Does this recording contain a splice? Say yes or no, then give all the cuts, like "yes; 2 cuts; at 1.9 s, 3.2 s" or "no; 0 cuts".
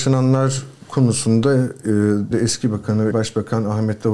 yes; 2 cuts; at 2.3 s, 3.1 s